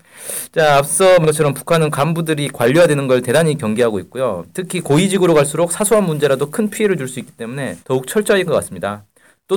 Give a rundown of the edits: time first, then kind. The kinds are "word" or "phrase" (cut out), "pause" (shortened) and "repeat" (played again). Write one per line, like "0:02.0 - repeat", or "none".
0:01.2 - word
0:07.8 - pause
0:08.5 - word